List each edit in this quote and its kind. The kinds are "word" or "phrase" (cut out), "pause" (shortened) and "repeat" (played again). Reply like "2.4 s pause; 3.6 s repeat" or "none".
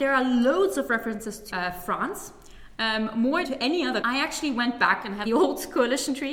1.5 s word; 3.4 s word; 4.0 s word; 5.3 s phrase